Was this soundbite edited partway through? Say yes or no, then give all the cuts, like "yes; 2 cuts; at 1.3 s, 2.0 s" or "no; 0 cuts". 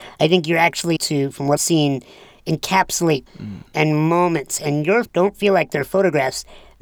yes; 4 cuts; at 1.0 s, 1.6 s, 3.3 s, 5.0 s